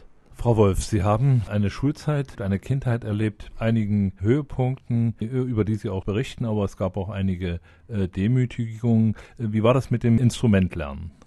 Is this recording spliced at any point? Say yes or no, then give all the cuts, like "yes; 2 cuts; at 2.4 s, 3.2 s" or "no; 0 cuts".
yes; 4 cuts; at 2.3 s, 3.5 s, 5.2 s, 6.0 s